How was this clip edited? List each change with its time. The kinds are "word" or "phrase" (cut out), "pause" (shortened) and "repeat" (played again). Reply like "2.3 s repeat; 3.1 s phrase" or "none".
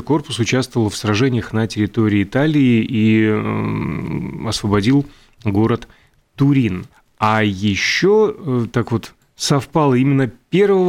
6.9 s pause